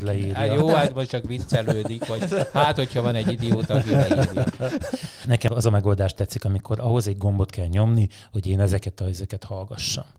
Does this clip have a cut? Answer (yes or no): no